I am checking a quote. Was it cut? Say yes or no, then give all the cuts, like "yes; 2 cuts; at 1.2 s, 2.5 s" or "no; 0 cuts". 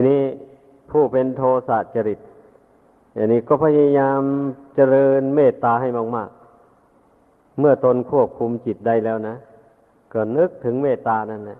no; 0 cuts